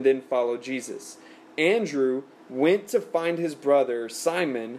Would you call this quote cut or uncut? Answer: uncut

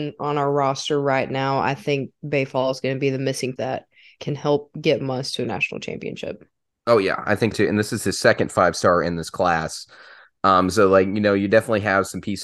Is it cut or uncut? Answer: cut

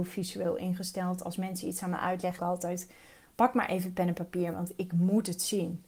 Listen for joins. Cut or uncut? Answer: cut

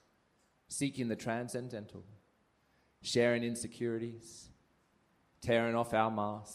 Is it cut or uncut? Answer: uncut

